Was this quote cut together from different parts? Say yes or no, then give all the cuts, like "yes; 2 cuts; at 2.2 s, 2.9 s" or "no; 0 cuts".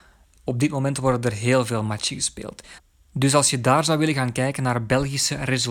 no; 0 cuts